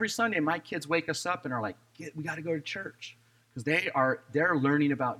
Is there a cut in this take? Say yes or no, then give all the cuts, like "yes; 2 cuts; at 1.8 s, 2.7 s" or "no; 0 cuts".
no; 0 cuts